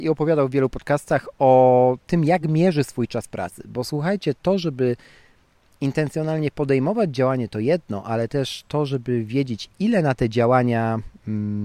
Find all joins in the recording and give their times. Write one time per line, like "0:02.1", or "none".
none